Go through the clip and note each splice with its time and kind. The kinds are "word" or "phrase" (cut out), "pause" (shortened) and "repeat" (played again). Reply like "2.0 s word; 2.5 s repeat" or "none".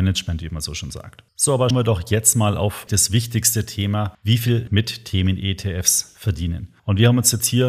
1.3 s pause; 1.7 s word; 2.9 s word; 4.7 s phrase